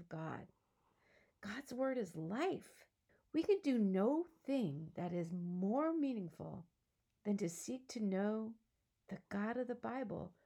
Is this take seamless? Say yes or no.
no